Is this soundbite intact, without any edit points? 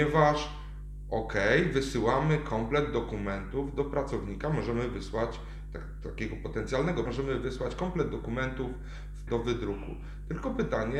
no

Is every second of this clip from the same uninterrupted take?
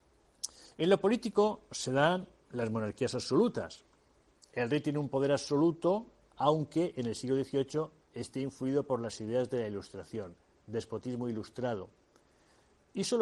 yes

